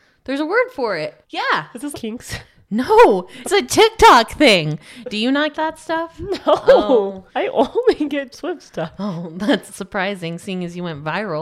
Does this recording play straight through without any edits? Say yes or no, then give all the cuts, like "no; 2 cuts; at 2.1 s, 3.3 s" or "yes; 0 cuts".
no; 7 cuts; at 1.2 s, 1.9 s, 3.4 s, 5.5 s, 7.3 s, 8.3 s, 9.7 s